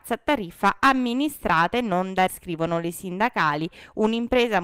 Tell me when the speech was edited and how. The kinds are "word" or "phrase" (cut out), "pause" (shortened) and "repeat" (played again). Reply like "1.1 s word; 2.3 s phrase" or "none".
2.3 s word; 2.9 s word